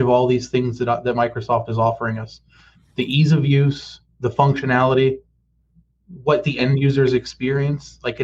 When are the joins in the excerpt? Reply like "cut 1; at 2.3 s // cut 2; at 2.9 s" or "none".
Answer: none